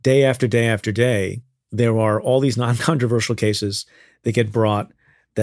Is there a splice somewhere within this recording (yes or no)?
no